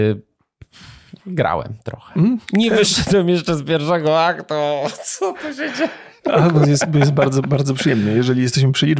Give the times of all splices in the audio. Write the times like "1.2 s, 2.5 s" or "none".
1.2 s